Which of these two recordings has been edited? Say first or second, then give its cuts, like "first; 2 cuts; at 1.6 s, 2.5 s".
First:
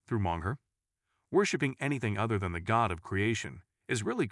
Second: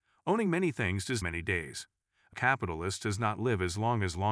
second; 2 cuts; at 1.2 s, 2.3 s